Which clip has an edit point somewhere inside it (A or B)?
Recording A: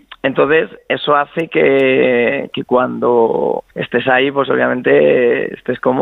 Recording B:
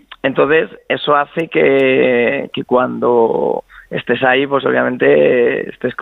A